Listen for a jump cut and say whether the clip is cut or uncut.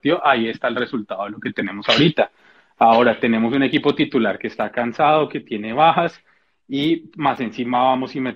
uncut